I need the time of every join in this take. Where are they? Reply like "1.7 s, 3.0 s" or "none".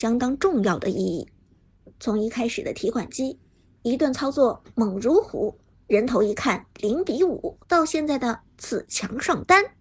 7.6 s